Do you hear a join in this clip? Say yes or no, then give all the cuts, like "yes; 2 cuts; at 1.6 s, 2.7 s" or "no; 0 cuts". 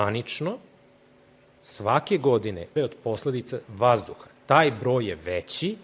yes; 2 cuts; at 2.8 s, 3.6 s